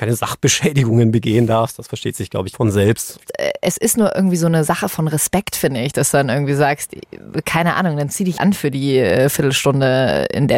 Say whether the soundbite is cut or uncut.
cut